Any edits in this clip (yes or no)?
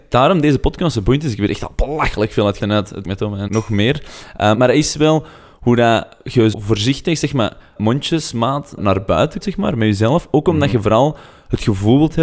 yes